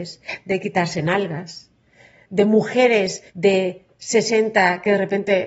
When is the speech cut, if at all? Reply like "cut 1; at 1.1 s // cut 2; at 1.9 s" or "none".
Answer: cut 1; at 3.3 s